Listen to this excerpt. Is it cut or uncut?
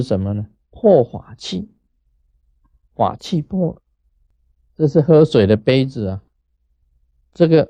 uncut